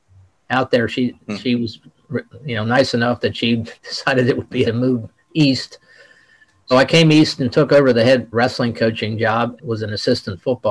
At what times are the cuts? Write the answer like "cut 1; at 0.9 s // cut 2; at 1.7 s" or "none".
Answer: cut 1; at 3.8 s // cut 2; at 4.6 s // cut 3; at 6.7 s // cut 4; at 8.3 s // cut 5; at 9.6 s